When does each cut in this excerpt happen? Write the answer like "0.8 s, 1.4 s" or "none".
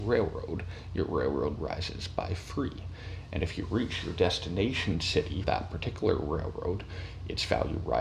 1.6 s, 5.4 s